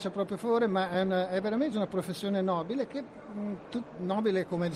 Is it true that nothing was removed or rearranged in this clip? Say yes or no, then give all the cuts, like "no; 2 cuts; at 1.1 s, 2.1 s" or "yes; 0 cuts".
yes; 0 cuts